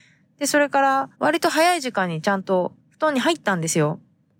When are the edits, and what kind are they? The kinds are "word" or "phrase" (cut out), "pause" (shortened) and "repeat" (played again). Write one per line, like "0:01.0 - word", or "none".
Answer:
0:01.1 - pause
0:02.8 - pause